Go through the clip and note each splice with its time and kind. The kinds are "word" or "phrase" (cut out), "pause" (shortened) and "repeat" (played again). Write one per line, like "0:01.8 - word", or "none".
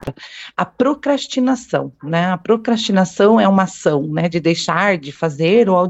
none